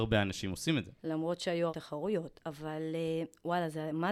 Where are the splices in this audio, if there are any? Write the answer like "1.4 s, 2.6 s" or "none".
1.0 s, 1.7 s